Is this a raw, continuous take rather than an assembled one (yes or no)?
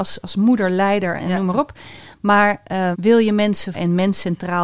no